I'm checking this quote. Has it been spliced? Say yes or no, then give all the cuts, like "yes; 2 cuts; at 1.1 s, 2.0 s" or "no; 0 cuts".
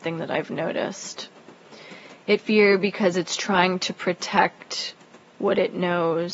yes; 1 cut; at 2.4 s